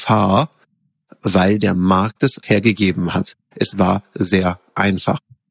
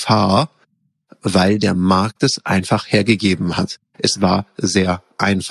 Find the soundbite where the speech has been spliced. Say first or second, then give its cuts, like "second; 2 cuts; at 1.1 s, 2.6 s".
first; 1 cut; at 2.4 s